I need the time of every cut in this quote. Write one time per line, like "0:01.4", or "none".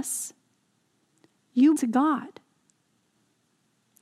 0:01.8

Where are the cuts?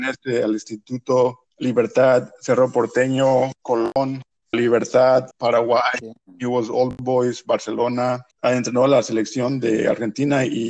0:01.5
0:04.5
0:05.3
0:08.3

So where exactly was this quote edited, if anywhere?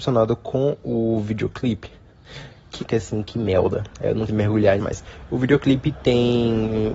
0:02.8
0:04.3
0:04.8

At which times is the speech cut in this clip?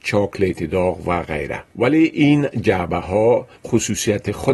0:01.7
0:03.6

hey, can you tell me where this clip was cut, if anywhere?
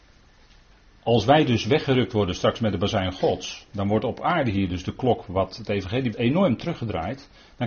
0:06.1

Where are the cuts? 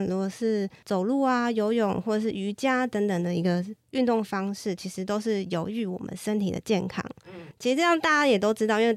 none

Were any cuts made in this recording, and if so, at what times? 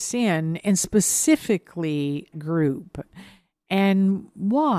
0:02.3

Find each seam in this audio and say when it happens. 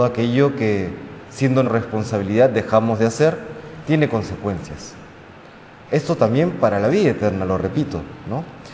0:01.6

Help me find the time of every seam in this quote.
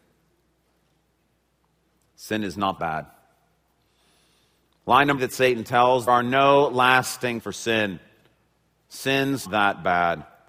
0:02.8
0:05.2
0:06.1
0:07.4
0:09.4

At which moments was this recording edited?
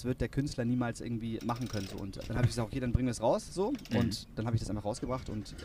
0:01.4
0:02.2

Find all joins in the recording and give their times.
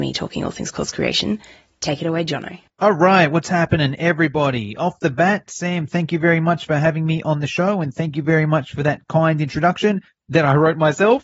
none

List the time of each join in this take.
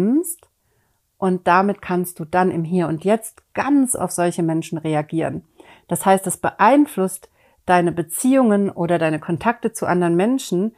0:04.0

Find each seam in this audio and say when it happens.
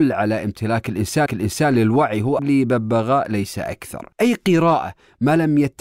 0:01.3
0:02.4
0:04.1

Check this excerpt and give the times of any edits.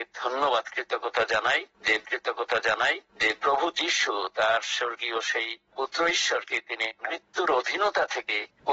0:02.0

